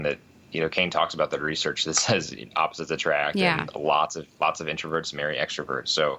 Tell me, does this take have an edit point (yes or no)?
no